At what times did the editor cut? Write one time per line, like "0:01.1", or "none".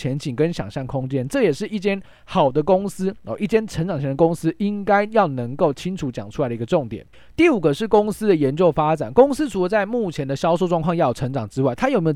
0:07.1